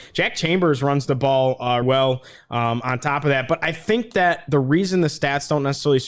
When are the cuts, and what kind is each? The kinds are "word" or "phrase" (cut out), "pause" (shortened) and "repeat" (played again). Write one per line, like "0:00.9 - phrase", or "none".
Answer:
0:01.8 - word